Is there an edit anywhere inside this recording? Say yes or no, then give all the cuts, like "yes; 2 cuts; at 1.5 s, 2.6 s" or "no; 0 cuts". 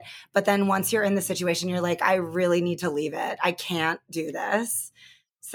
no; 0 cuts